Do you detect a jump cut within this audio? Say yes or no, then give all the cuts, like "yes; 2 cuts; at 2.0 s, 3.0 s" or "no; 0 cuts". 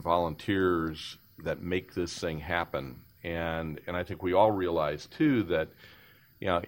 no; 0 cuts